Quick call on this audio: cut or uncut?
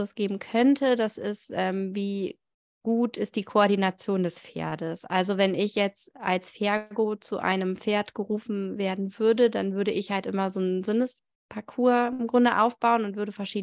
uncut